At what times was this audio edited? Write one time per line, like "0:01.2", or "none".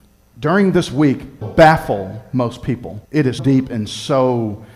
0:01.4
0:03.0
0:03.4